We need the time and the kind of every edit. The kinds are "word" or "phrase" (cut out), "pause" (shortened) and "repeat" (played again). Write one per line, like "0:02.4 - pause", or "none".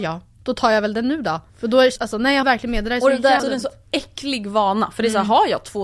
0:01.5 - pause
0:02.0 - word
0:02.4 - word
0:03.4 - word